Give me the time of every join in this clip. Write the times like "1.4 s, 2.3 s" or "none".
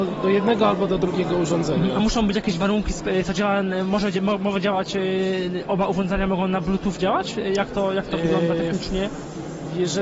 none